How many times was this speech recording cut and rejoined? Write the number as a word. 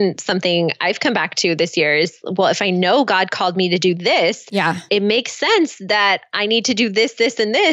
one